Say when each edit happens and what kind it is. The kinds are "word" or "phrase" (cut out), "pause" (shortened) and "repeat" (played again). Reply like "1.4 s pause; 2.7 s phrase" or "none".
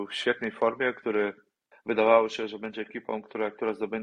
1.7 s word